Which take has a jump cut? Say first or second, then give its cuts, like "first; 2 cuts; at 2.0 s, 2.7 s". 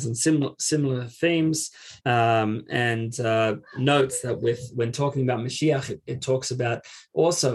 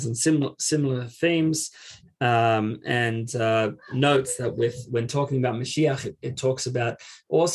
first; 1 cut; at 2.0 s